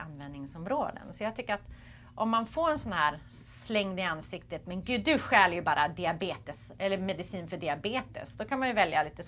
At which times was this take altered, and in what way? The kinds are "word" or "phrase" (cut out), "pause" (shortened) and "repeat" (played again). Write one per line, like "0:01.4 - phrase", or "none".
none